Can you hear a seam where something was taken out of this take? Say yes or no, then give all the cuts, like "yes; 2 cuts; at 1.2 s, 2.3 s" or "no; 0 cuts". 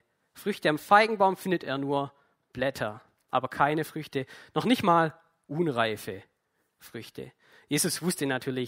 no; 0 cuts